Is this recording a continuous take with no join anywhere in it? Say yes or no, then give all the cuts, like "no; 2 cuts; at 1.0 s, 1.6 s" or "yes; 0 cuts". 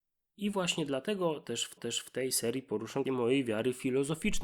no; 2 cuts; at 1.8 s, 3.0 s